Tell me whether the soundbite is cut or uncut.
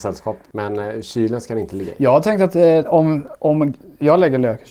uncut